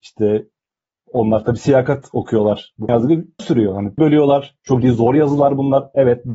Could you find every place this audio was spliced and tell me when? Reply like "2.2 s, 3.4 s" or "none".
2.9 s, 3.4 s, 4.0 s, 4.8 s